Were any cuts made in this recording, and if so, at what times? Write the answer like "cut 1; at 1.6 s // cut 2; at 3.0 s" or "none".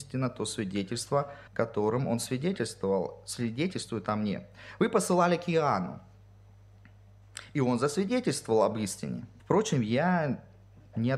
cut 1; at 1.5 s // cut 2; at 9.4 s